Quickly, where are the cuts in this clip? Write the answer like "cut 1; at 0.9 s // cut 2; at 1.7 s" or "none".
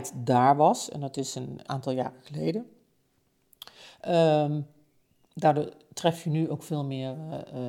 cut 1; at 1.6 s